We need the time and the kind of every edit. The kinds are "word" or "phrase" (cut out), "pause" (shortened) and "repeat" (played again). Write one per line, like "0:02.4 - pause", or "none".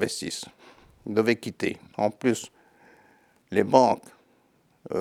none